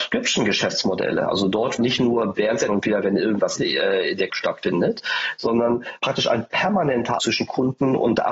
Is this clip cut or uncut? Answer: cut